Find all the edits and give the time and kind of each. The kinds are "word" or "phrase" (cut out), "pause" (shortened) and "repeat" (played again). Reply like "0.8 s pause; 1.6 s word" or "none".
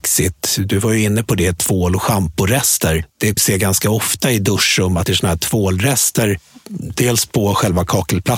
3.4 s phrase; 5.1 s phrase

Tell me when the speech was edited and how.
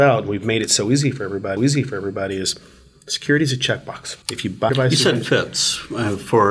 1.6 s repeat; 4.2 s pause; 4.7 s word

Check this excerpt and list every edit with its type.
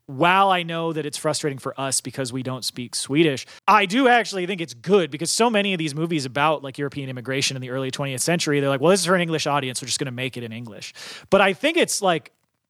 3.6 s pause

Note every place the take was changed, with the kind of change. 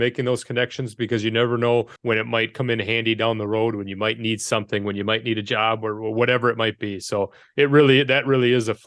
2.0 s pause

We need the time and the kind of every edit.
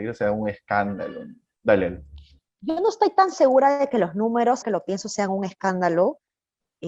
2.4 s pause; 4.6 s word

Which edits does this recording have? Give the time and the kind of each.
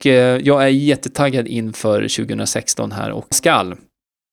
3.3 s phrase

